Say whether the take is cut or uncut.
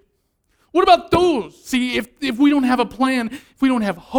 uncut